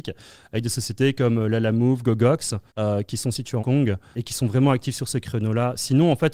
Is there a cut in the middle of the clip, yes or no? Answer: yes